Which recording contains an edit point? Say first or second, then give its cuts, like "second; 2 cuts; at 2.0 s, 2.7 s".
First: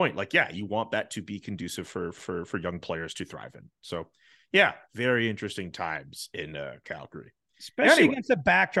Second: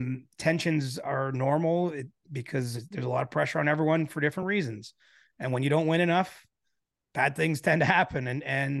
first; 2 cuts; at 2.2 s, 4.9 s